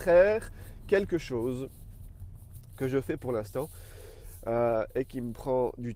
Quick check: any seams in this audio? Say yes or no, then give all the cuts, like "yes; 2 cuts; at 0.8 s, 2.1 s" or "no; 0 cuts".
no; 0 cuts